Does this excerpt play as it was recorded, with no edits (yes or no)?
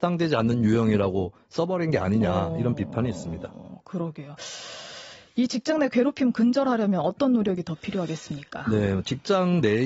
yes